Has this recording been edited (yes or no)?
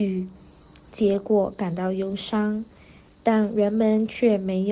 no